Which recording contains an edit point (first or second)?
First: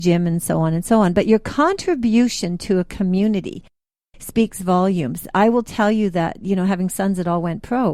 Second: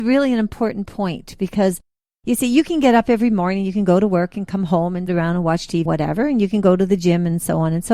second